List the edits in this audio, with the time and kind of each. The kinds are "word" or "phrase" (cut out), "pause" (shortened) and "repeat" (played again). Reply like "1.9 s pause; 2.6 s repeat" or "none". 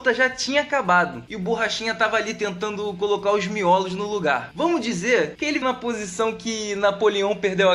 5.6 s word